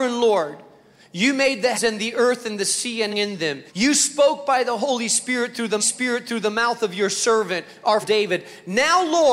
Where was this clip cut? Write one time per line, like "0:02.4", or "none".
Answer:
0:01.7
0:03.1
0:03.7
0:05.8
0:08.0